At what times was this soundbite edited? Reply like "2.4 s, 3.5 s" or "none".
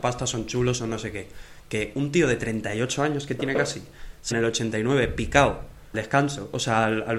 4.3 s, 5.9 s